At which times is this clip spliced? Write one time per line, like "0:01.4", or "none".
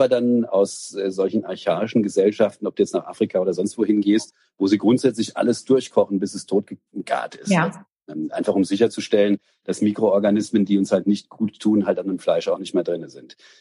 none